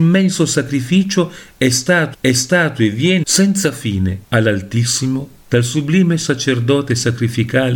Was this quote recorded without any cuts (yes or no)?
no